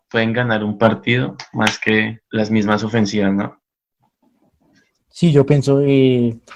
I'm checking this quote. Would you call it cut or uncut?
cut